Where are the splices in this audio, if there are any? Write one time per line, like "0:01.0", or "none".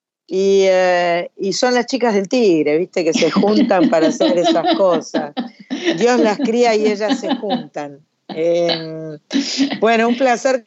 none